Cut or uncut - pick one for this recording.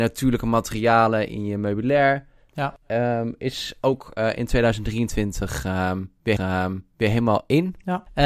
cut